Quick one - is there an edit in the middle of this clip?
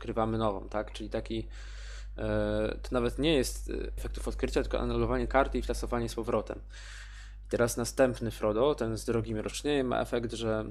yes; 2 cuts; at 4.0 s, 5.3 s

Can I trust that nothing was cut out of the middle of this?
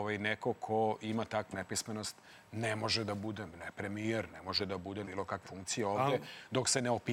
no; 6 cuts; at 1.5 s, 3.5 s, 4.3 s, 4.6 s, 5.0 s, 5.4 s

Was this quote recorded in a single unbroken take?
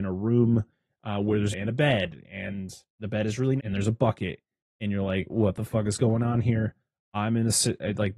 no; 3 cuts; at 1.5 s, 2.9 s, 3.6 s

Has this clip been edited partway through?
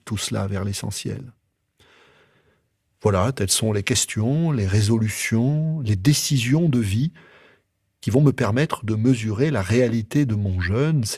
no; 0 cuts

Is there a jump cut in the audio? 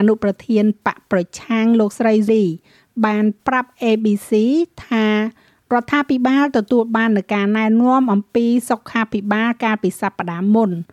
yes; 1 cut; at 2.3 s

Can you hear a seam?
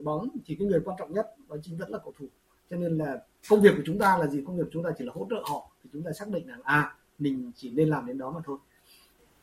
no; 0 cuts

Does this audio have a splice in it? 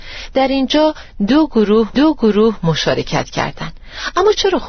yes; 1 cut; at 1.9 s

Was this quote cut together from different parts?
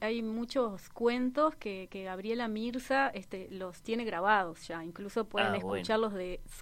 yes; 1 cut; at 1.9 s

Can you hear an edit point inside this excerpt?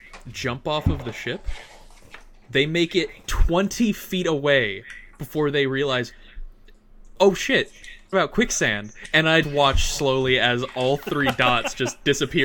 yes; 2 cuts; at 8.1 s, 9.4 s

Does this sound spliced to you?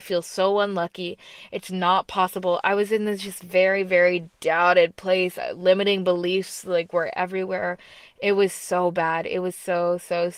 no; 0 cuts

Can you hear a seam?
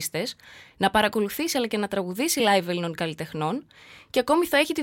no; 0 cuts

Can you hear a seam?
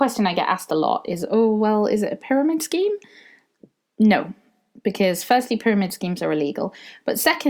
no; 0 cuts

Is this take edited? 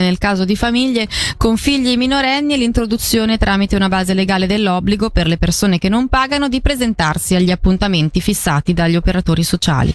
no; 0 cuts

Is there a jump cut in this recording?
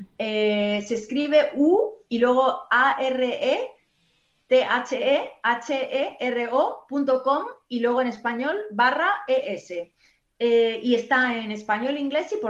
no; 0 cuts

